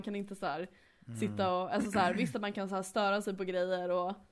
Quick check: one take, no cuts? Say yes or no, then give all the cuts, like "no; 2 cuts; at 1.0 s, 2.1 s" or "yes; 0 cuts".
yes; 0 cuts